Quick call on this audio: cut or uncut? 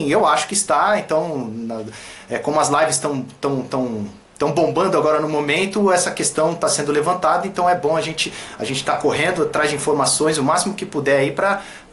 uncut